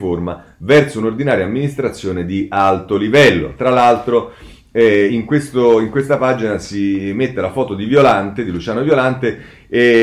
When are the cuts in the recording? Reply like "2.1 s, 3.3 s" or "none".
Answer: none